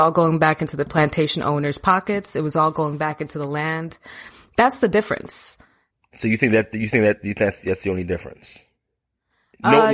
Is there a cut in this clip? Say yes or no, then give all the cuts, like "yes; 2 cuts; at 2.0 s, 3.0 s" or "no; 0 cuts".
no; 0 cuts